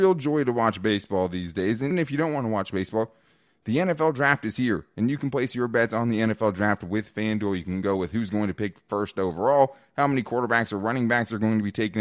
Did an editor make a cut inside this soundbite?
yes; 1 cut; at 1.9 s

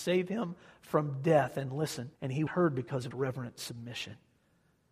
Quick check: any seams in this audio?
yes; 3 cuts; at 2.1 s, 2.5 s, 3.1 s

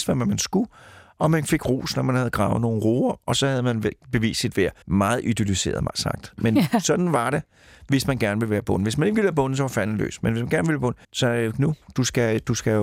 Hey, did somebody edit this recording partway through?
yes; 2 cuts; at 4.8 s, 11.0 s

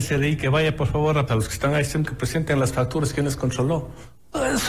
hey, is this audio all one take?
no; 2 cuts; at 1.3 s, 2.0 s

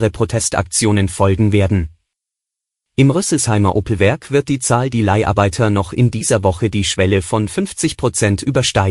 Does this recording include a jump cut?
yes; 1 cut; at 2.3 s

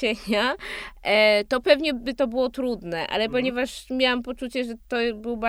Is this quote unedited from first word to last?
yes; 0 cuts

